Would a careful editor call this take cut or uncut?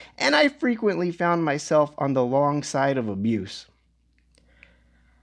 uncut